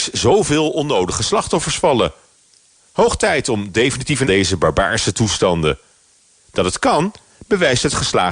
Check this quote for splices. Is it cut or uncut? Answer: cut